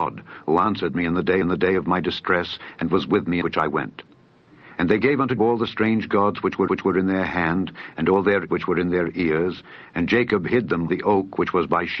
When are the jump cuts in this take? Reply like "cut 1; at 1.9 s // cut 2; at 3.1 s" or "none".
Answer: cut 1; at 1.4 s // cut 2; at 3.4 s // cut 3; at 5.4 s // cut 4; at 6.7 s // cut 5; at 8.5 s // cut 6; at 10.9 s